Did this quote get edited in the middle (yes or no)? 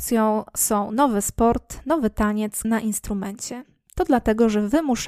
yes